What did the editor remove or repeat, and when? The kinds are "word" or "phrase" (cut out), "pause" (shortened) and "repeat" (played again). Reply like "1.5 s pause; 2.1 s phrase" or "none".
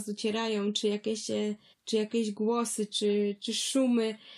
1.7 s pause